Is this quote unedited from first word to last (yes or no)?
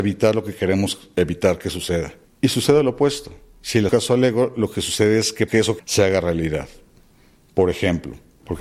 no